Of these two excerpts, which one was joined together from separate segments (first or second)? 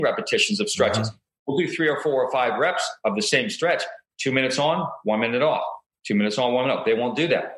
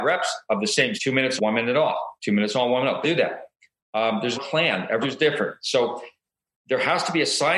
second